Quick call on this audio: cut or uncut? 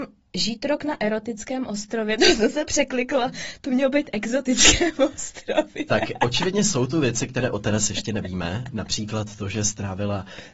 uncut